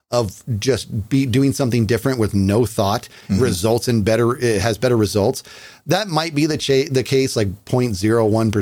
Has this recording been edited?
no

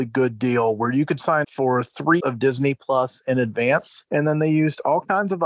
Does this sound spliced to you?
yes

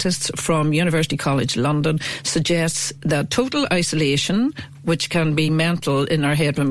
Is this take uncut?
yes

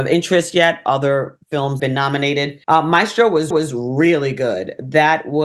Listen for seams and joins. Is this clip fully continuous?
no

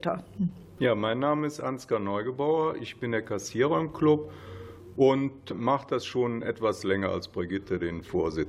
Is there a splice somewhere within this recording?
no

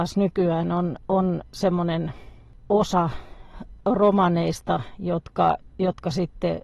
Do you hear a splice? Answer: no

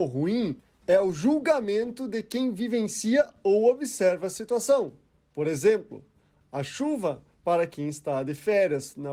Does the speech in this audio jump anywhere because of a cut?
no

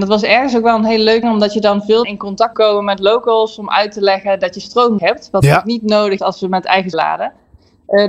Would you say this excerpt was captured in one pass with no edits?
no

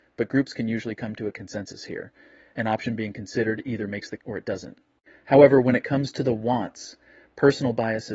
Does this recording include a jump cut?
yes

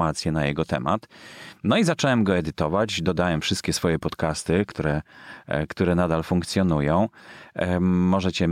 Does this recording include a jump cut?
no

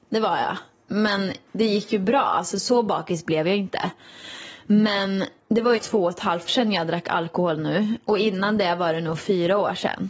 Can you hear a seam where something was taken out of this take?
yes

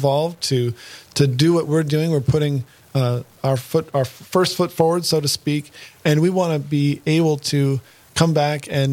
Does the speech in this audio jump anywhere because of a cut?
no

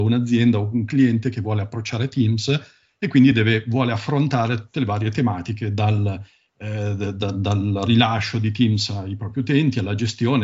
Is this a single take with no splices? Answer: yes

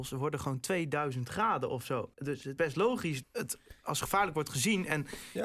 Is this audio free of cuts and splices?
no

